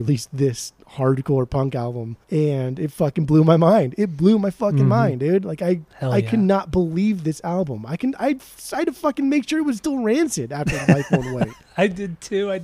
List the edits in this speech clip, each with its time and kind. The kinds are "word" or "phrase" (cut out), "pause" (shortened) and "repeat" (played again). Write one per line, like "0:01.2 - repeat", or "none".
0:02.2 - pause
0:05.9 - pause